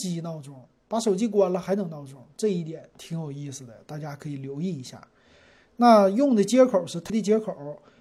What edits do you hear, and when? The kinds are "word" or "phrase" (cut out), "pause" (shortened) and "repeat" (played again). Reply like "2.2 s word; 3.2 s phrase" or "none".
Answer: 7.1 s phrase